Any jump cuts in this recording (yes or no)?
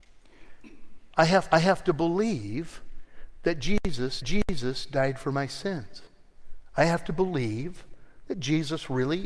yes